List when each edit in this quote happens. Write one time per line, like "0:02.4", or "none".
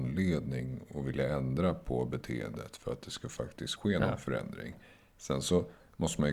none